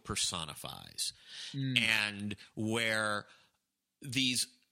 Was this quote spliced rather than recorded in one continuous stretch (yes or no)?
no